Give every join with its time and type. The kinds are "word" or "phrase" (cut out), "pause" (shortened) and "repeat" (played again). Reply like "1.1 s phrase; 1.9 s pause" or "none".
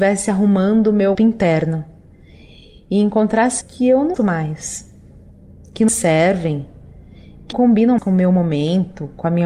1.1 s word; 3.6 s word; 4.1 s word; 5.9 s word; 7.5 s word; 8.0 s word